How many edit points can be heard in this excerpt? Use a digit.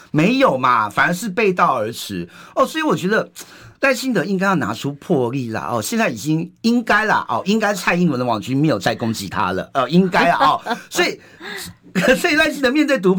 1